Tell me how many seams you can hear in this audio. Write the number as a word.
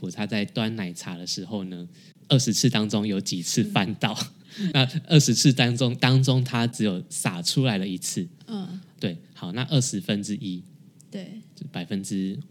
one